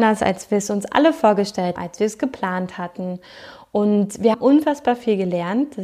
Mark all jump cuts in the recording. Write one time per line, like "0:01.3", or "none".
0:01.8
0:04.3